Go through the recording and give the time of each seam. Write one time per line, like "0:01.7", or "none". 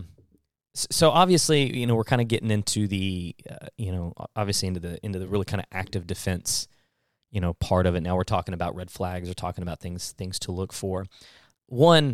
none